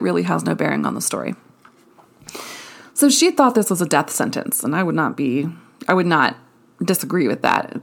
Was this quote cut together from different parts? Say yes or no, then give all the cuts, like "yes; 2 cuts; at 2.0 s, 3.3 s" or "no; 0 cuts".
no; 0 cuts